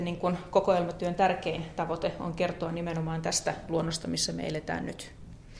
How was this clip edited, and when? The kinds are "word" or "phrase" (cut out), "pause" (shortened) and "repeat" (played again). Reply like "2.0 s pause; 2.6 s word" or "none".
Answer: none